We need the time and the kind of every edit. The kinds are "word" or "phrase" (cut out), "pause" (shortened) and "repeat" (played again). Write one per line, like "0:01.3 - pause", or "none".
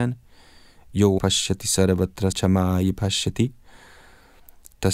0:01.2 - word
0:02.3 - word

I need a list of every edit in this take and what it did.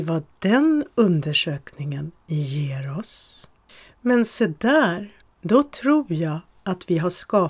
0:03.7 - pause
0:05.2 - pause

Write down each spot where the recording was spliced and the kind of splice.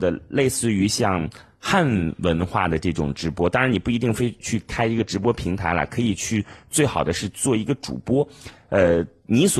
none

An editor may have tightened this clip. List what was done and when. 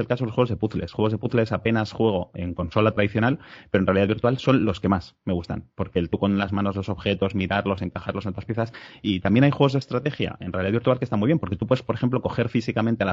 0:02.3 - word
0:06.1 - phrase

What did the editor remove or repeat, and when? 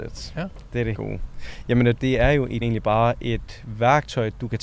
0:00.9 - word
0:02.0 - word
0:02.6 - word

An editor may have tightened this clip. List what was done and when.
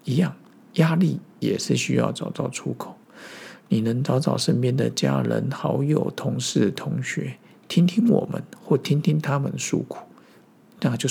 none

